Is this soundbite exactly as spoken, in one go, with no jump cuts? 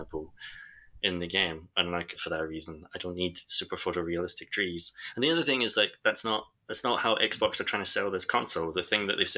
no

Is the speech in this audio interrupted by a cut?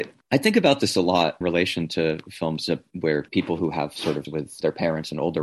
yes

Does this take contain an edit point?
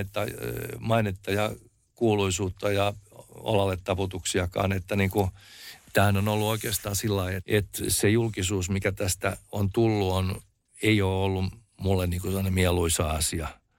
yes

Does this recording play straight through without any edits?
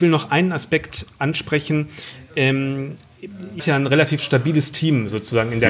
no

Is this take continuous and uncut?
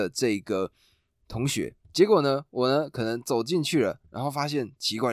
no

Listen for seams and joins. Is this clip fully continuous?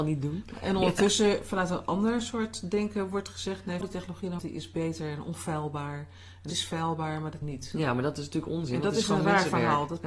no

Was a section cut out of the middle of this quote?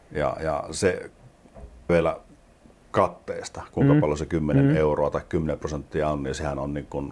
yes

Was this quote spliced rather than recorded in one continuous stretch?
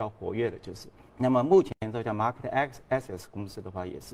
yes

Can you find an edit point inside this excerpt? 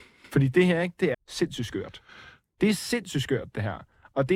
yes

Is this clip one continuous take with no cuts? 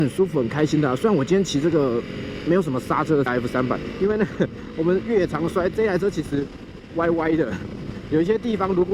no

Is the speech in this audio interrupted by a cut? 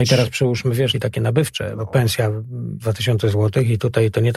yes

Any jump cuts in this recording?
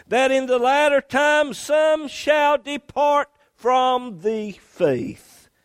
no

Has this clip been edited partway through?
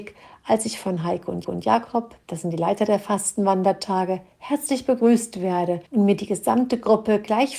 yes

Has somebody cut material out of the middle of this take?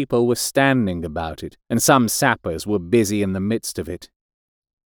yes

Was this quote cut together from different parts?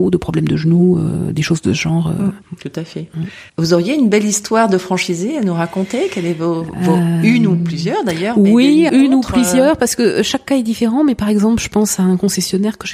yes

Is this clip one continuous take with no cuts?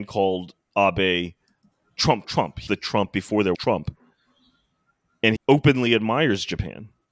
no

